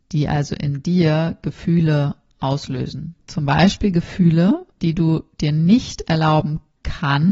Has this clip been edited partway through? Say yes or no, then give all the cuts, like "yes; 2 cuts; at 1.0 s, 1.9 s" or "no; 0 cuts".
yes; 2 cuts; at 3.2 s, 4.7 s